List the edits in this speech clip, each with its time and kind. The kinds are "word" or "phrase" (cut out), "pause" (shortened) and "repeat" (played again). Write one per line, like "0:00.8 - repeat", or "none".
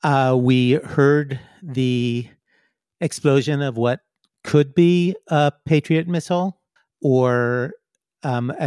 0:06.8 - pause